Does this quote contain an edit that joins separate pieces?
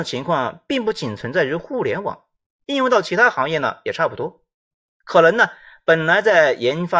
no; 0 cuts

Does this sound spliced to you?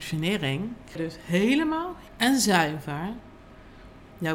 yes; 2 cuts; at 1.0 s, 2.1 s

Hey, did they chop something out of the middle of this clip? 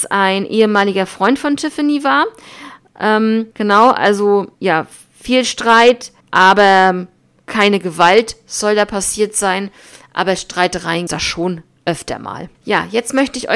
yes; 5 cuts; at 3.5 s, 4.5 s, 6.2 s, 11.1 s, 12.5 s

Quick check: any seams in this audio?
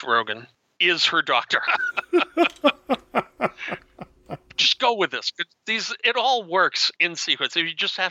yes; 2 cuts; at 6.0 s, 7.0 s

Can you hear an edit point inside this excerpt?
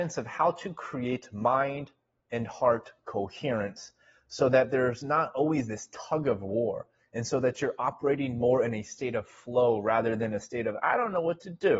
no; 0 cuts

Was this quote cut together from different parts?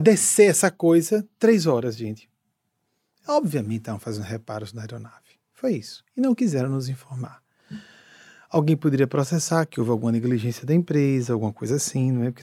no; 0 cuts

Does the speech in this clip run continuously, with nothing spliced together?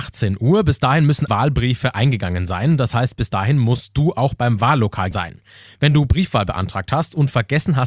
no; 2 cuts; at 1.3 s, 5.1 s

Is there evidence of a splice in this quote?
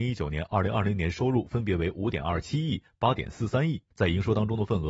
yes; 1 cut; at 3.9 s

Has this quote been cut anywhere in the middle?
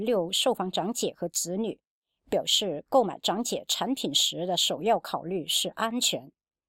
no; 0 cuts

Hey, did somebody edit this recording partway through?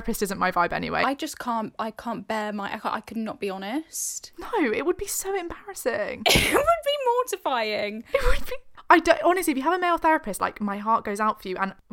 no; 0 cuts

